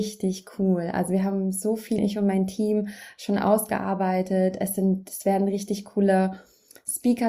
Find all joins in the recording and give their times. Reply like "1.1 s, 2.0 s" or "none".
2.0 s